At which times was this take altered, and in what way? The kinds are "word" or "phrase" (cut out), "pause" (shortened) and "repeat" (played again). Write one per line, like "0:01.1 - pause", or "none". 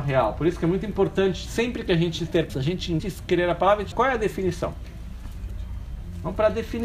0:02.5 - word
0:03.0 - word
0:03.9 - word